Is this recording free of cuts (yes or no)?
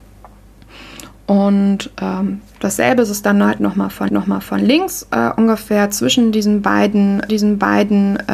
no